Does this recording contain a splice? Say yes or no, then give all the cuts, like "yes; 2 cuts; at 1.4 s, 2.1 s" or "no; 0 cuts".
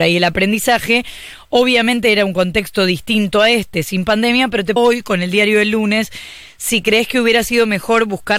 yes; 1 cut; at 4.8 s